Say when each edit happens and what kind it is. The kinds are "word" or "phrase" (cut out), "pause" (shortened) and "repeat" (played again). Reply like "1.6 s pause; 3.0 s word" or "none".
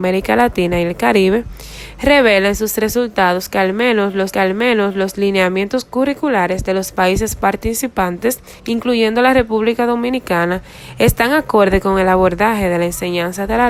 4.3 s repeat; 8.6 s pause